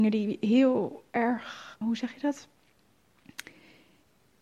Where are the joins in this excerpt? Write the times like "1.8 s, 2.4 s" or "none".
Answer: 1.8 s